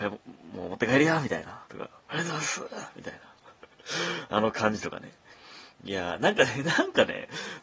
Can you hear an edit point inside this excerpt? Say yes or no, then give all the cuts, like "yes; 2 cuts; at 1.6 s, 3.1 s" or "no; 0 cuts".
yes; 2 cuts; at 1.7 s, 5.7 s